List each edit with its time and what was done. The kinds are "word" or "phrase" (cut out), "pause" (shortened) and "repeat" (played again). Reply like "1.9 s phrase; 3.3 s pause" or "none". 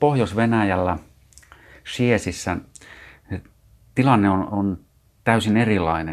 none